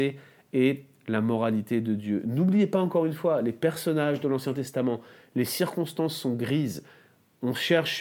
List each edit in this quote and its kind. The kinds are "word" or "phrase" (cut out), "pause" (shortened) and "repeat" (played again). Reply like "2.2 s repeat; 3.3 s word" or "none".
none